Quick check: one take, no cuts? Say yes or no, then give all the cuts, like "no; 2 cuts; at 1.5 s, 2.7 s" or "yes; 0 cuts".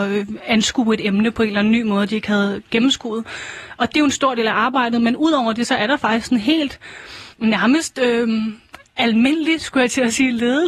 no; 1 cut; at 7.3 s